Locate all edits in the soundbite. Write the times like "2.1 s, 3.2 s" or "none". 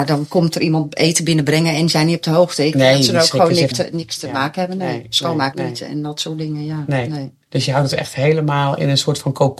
3.7 s, 5.5 s, 7.5 s